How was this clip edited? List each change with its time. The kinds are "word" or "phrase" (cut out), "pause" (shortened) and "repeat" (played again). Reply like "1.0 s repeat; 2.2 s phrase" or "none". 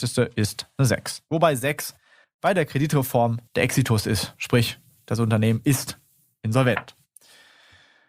3.5 s pause

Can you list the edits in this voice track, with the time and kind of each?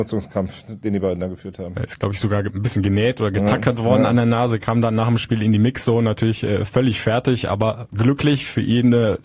none

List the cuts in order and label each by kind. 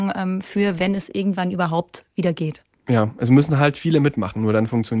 none

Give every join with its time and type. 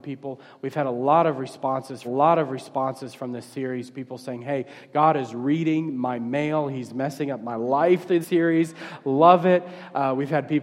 2.0 s repeat; 8.2 s word

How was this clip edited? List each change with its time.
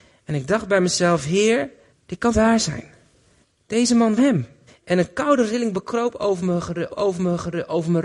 1.9 s pause; 2.3 s word; 3.4 s pause; 4.2 s word; 4.7 s pause; 6.9 s repeat

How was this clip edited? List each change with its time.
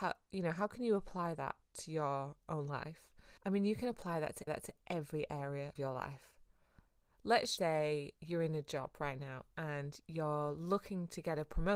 1.6 s pause; 3.4 s pause; 4.5 s repeat; 5.8 s word; 7.6 s word; 8.2 s pause

